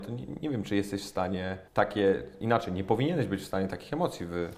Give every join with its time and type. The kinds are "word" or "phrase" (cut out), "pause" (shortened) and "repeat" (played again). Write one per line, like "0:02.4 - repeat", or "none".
0:01.7 - pause